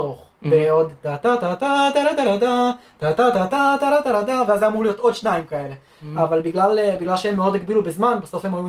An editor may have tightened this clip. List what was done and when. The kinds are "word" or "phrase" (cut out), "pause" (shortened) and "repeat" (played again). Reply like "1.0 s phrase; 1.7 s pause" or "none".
none